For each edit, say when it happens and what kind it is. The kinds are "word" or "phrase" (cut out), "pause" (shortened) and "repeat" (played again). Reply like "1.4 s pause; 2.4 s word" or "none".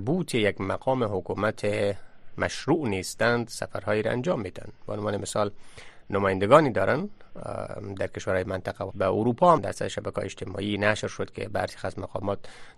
8.4 s word; 8.9 s word; 9.6 s word